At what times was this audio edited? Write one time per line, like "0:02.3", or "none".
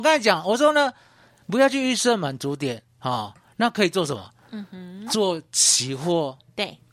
none